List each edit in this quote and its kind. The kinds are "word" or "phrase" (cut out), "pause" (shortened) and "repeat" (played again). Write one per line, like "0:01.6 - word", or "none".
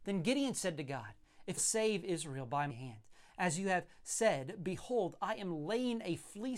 0:01.6 - phrase
0:02.7 - word